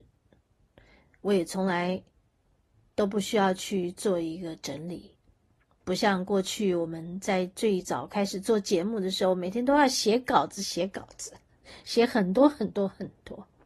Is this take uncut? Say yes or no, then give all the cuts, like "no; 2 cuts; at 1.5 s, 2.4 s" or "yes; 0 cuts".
yes; 0 cuts